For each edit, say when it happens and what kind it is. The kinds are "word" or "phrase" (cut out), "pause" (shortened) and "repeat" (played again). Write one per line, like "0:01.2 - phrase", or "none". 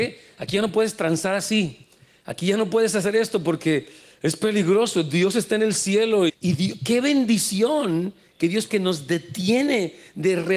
0:06.3 - word
0:08.7 - phrase